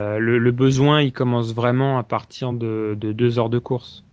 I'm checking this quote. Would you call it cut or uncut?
uncut